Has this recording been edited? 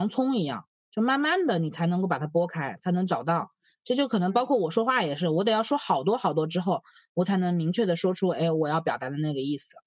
no; 0 cuts

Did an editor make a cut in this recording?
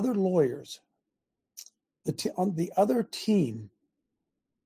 no; 0 cuts

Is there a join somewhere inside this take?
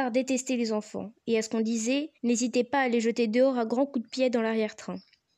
yes; 1 cut; at 2.1 s

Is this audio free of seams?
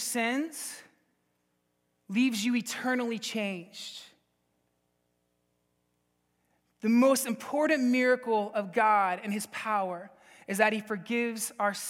yes; 0 cuts

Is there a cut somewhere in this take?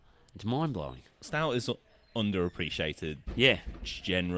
no; 0 cuts

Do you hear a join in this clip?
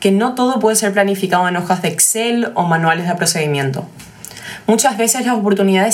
no; 0 cuts

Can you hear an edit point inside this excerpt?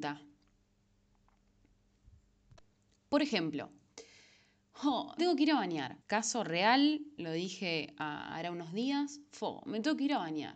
yes; 2 cuts; at 5.2 s, 6.0 s

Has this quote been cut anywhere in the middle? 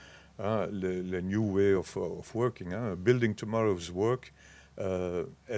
no; 0 cuts

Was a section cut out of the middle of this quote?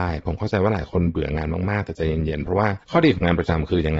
yes; 1 cut; at 2.8 s

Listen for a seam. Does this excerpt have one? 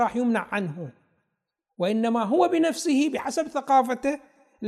no; 0 cuts

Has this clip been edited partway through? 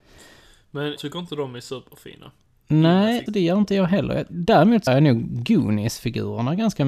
yes; 3 cuts; at 1.0 s, 3.3 s, 4.9 s

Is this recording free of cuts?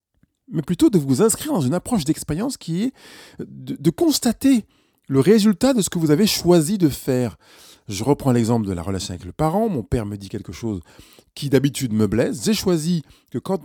yes; 0 cuts

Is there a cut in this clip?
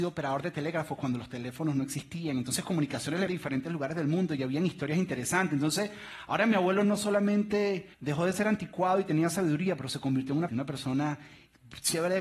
yes; 3 cuts; at 3.3 s, 7.9 s, 10.5 s

